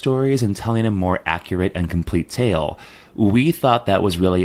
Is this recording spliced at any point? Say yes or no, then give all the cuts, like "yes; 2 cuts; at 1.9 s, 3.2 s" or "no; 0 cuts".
no; 0 cuts